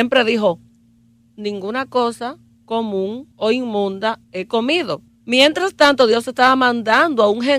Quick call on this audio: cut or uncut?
cut